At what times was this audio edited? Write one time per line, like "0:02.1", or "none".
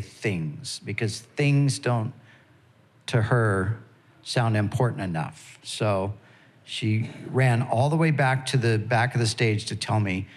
none